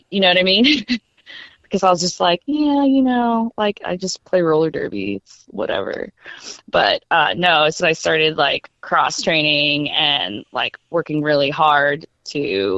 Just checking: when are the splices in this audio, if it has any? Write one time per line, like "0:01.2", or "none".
0:01.0
0:07.8
0:08.8